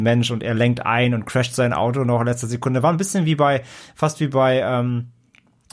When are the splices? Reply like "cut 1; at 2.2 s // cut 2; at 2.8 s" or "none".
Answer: none